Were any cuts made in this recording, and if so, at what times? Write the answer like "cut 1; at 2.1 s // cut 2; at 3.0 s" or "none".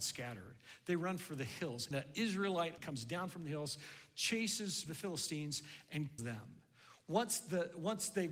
cut 1; at 1.9 s // cut 2; at 2.8 s // cut 3; at 4.9 s // cut 4; at 6.2 s